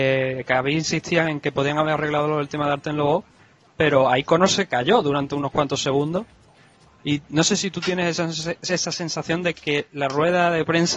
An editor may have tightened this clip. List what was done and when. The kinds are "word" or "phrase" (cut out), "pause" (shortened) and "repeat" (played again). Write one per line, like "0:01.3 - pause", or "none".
none